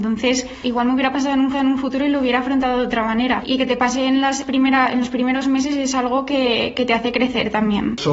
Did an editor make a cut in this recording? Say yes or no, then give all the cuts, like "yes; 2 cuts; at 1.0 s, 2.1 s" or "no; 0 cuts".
yes; 1 cut; at 1.5 s